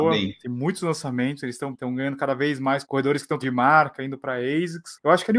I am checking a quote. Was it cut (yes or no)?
yes